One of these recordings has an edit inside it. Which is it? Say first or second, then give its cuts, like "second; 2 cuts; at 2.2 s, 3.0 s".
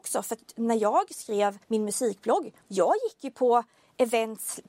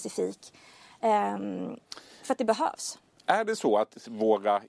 first; 2 cuts; at 1.6 s, 2.6 s